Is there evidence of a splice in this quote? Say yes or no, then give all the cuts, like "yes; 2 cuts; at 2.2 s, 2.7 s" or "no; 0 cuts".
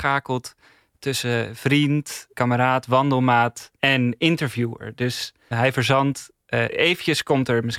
yes; 4 cuts; at 2.3 s, 3.7 s, 5.5 s, 6.7 s